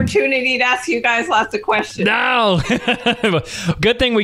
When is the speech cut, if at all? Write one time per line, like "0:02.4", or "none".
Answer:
none